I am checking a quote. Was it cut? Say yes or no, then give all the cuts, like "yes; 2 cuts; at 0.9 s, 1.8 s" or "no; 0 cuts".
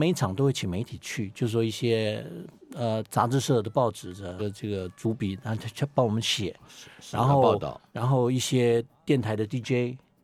yes; 2 cuts; at 4.4 s, 7.9 s